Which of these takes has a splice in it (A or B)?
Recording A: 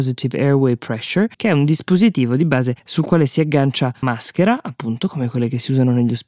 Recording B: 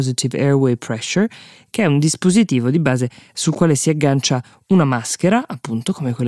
A